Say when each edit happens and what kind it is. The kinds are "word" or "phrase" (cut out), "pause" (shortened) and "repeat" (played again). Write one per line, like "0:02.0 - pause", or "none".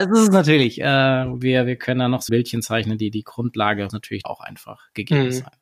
0:02.3 - word
0:03.9 - word
0:04.2 - word